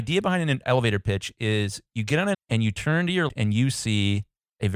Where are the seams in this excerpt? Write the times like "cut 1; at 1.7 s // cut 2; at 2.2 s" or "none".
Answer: cut 1; at 2.3 s // cut 2; at 3.3 s